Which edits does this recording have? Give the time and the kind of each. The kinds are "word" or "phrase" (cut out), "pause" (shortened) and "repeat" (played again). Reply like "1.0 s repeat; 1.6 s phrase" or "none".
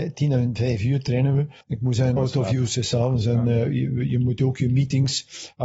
1.6 s pause; 2.2 s phrase